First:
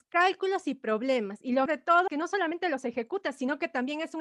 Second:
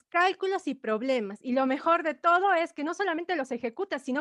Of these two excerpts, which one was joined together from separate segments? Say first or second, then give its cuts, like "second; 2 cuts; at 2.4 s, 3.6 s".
first; 2 cuts; at 1.7 s, 2.1 s